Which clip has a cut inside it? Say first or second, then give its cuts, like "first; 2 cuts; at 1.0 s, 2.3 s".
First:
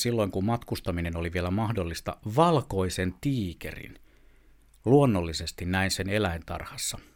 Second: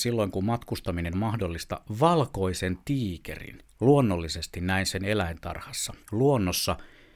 second; 3 cuts; at 1.1 s, 3.6 s, 6.0 s